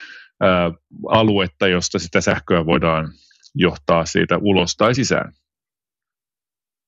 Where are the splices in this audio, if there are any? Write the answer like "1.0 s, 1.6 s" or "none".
none